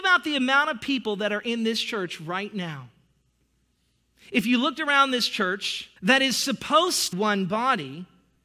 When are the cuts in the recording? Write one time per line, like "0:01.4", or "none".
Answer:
0:06.0
0:07.1